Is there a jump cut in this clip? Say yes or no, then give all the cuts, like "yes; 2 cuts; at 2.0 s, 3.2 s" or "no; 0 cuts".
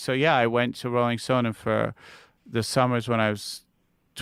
no; 0 cuts